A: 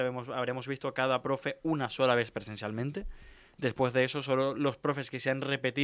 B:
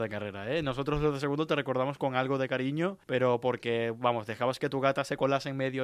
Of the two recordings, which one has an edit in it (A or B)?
B